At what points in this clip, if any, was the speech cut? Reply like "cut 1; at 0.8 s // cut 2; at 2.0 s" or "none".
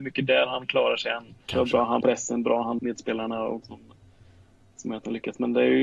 cut 1; at 1.5 s // cut 2; at 2.0 s // cut 3; at 2.8 s // cut 4; at 3.6 s